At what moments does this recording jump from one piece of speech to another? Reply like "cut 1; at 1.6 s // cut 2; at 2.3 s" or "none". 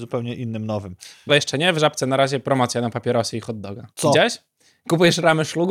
cut 1; at 1.3 s // cut 2; at 3.9 s